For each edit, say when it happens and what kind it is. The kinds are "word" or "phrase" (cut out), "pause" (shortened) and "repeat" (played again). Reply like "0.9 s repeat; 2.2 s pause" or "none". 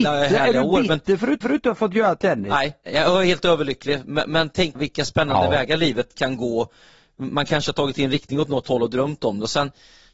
1.4 s repeat; 2.8 s pause; 4.7 s word